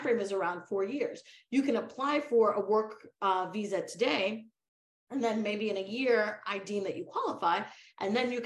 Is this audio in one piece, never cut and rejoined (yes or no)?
yes